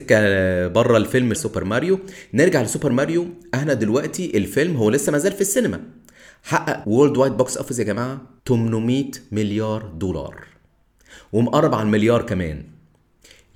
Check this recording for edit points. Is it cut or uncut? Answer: cut